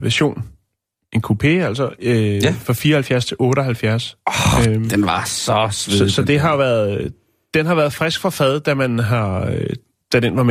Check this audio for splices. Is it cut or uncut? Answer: uncut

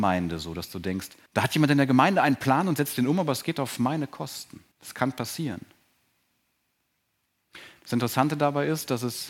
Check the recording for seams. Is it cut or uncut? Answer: cut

